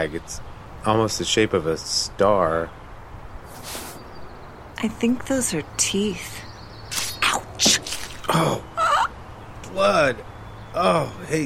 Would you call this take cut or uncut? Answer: uncut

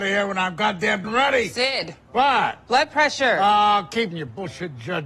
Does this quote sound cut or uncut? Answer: cut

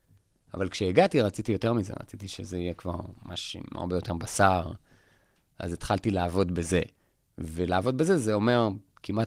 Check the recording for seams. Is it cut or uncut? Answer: cut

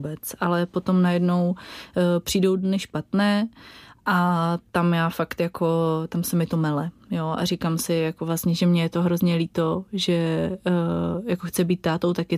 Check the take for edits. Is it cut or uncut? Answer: uncut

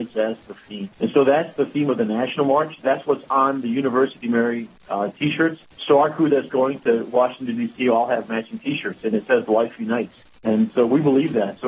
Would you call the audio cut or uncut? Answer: cut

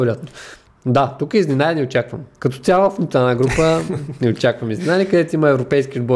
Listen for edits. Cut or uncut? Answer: uncut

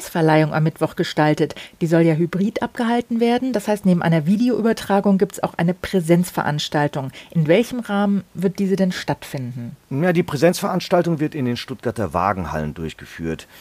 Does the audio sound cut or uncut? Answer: cut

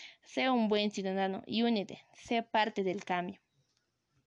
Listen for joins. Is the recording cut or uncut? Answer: uncut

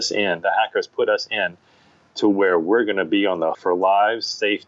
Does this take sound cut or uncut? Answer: cut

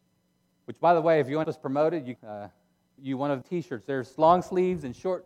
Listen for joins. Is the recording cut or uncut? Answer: cut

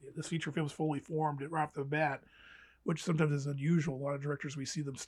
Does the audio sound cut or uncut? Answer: uncut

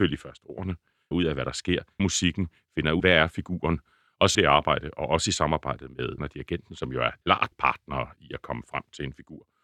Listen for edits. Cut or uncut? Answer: cut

